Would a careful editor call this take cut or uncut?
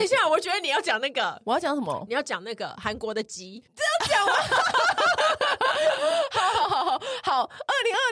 uncut